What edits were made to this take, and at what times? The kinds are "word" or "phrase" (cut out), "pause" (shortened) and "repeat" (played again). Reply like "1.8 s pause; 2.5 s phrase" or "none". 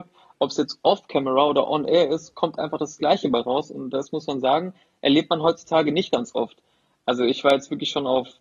none